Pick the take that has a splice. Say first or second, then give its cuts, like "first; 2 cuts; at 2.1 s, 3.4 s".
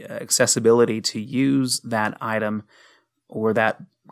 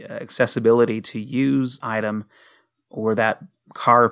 second; 1 cut; at 1.8 s